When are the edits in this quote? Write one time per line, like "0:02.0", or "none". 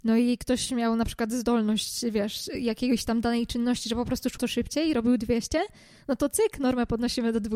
0:04.4